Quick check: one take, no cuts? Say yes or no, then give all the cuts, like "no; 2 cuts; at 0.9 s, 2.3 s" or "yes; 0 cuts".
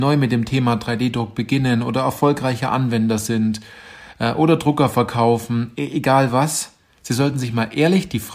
yes; 0 cuts